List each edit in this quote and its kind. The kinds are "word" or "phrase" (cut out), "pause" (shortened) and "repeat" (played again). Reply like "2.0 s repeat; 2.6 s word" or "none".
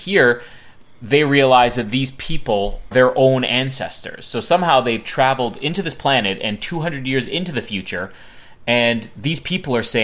2.9 s word